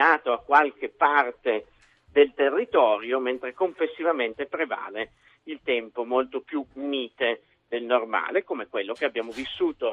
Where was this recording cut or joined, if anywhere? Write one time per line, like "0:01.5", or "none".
none